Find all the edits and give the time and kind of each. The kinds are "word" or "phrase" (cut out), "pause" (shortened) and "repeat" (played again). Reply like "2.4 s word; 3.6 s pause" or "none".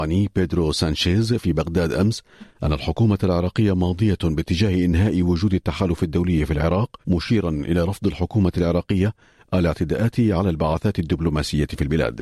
7.0 s pause

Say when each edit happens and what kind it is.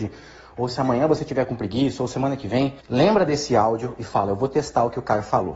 2.8 s pause

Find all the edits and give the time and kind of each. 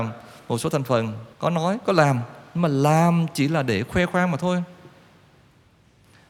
1.3 s pause

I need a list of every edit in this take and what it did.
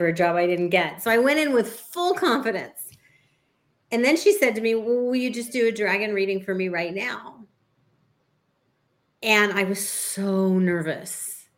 none

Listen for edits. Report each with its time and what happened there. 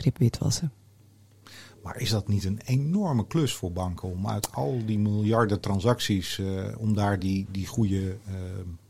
none

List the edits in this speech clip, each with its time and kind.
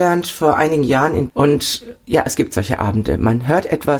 1.3 s word

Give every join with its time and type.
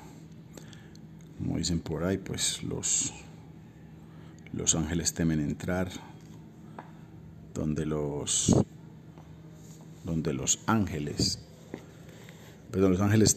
none

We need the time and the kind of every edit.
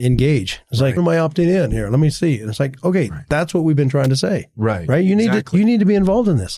1.0 s phrase

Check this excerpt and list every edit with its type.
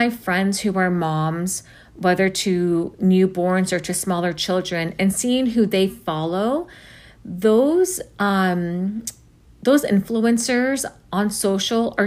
none

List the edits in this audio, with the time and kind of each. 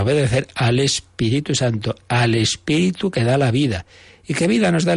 none

